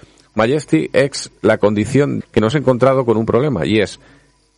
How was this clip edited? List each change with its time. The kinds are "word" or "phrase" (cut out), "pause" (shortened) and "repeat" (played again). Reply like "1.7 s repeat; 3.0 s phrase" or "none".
1.4 s pause; 2.2 s phrase; 2.5 s word